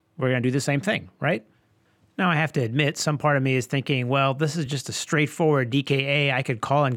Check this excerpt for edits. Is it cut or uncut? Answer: uncut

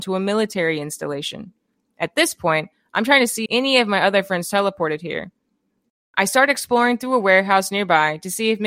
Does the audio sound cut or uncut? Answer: cut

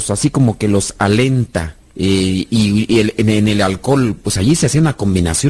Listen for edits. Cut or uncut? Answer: uncut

